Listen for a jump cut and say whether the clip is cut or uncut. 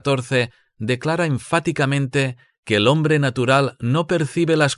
uncut